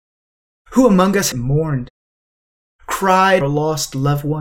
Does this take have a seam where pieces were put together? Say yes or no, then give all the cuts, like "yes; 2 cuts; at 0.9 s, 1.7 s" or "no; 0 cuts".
yes; 2 cuts; at 1.3 s, 3.4 s